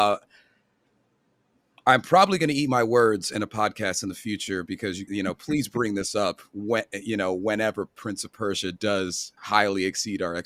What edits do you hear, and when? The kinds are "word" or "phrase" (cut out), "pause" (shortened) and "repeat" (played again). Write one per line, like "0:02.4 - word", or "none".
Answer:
0:05.1 - word
0:09.4 - pause